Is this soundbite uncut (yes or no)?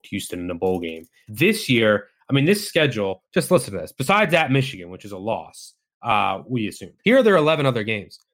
no